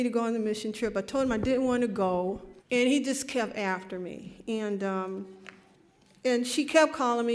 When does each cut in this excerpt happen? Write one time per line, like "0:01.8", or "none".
0:02.6